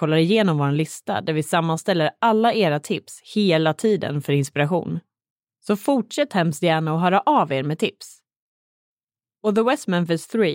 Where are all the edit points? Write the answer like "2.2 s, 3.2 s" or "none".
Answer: none